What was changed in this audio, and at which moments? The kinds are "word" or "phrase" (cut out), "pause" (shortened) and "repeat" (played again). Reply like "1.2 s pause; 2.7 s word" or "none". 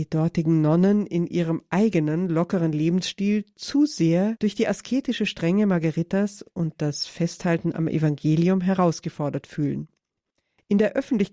none